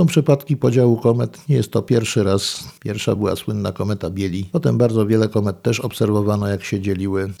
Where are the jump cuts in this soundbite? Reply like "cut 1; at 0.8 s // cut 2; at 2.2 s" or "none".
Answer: none